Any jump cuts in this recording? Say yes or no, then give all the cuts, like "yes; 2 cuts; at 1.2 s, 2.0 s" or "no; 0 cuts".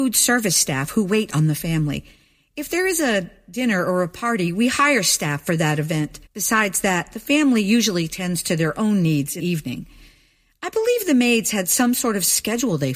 yes; 2 cuts; at 6.3 s, 9.4 s